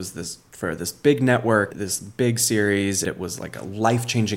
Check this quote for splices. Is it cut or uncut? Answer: cut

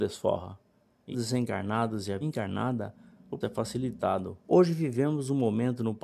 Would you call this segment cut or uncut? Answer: cut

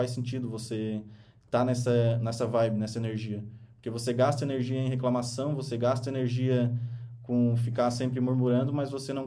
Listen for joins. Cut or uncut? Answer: uncut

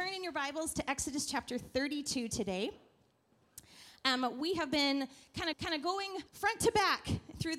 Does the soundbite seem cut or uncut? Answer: cut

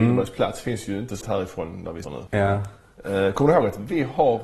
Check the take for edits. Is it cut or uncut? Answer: cut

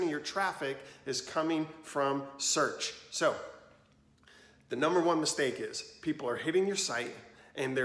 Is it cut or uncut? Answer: uncut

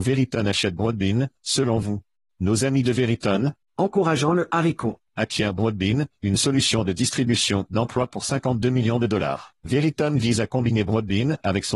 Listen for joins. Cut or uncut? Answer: cut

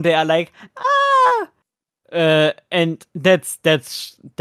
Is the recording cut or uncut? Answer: uncut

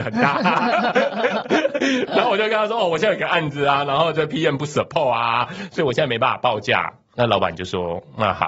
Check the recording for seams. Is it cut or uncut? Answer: uncut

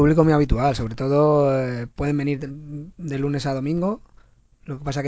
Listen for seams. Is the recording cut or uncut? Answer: uncut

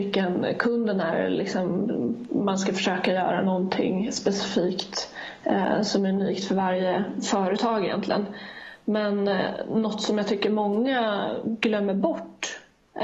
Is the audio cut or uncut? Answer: uncut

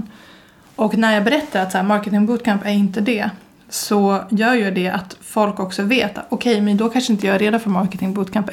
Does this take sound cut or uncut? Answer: uncut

